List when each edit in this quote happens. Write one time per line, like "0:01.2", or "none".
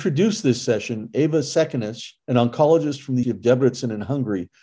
0:02.2
0:03.2

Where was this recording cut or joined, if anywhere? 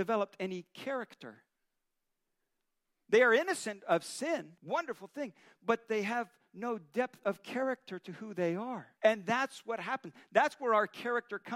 0:04.6
0:09.0

